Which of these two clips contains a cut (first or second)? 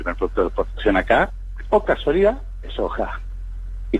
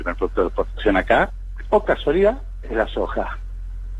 first